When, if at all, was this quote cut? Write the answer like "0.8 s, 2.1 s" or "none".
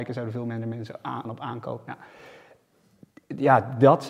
1.2 s